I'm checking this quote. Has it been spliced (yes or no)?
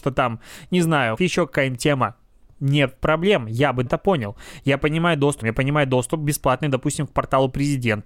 yes